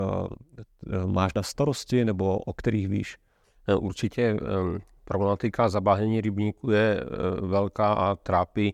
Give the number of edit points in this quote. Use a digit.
1